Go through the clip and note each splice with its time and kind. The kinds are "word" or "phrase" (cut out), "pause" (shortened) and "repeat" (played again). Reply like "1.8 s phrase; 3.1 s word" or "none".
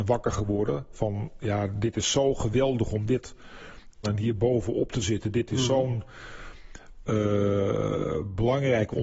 4.0 s phrase